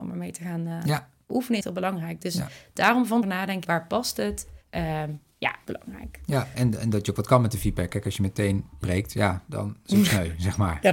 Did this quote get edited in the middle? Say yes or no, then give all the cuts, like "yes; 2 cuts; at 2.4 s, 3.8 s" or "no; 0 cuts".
yes; 7 cuts; at 1.6 s, 3.2 s, 3.6 s, 4.6 s, 5.6 s, 6.5 s, 8.8 s